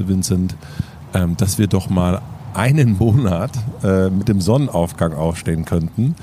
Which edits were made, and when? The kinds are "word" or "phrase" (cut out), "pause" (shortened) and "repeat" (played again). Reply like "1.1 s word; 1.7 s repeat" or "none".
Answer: none